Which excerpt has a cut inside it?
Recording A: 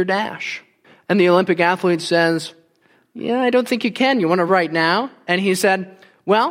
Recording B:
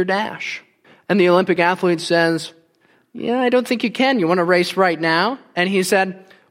A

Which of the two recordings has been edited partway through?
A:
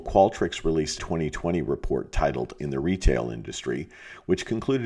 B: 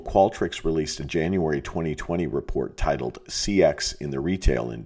A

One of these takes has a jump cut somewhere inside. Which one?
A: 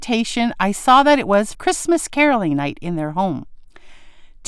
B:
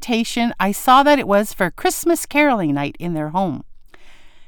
A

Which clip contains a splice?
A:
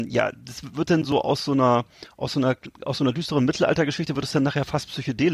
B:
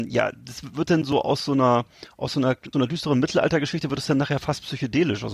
B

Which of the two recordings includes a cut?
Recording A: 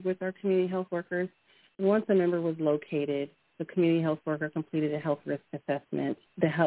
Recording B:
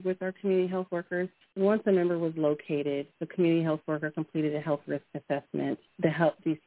B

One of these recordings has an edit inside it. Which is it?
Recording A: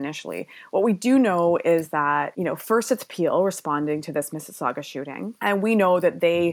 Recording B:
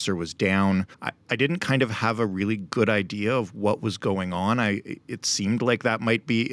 B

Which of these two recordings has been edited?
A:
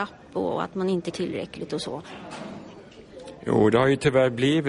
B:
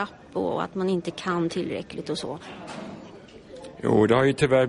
A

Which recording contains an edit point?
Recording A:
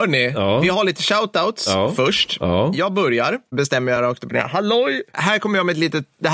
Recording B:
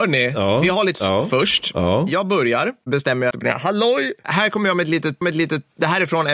B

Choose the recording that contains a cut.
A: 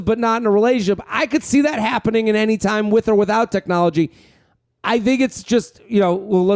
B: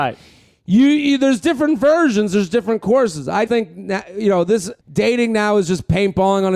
B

